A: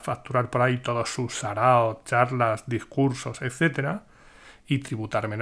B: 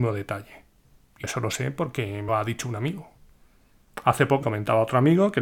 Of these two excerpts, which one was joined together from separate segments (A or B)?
B